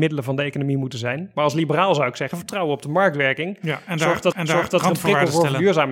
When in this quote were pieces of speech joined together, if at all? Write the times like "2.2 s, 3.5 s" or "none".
4.3 s